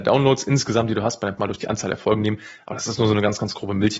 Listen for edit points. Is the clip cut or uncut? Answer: cut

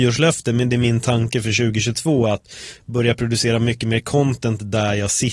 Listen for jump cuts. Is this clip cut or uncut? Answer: uncut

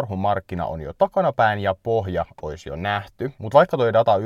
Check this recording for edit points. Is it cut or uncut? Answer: uncut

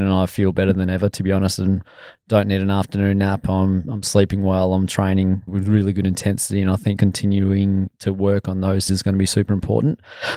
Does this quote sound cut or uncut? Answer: cut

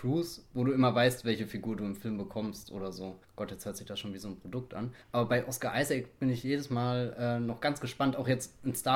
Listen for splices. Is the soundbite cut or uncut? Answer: uncut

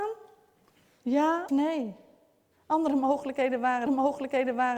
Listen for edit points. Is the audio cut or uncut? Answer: cut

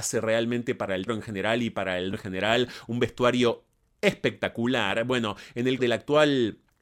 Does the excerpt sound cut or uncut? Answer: cut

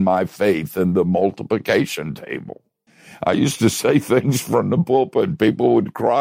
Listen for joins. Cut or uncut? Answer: cut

